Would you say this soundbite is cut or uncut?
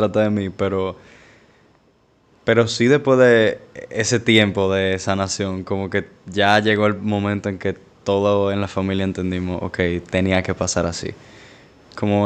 uncut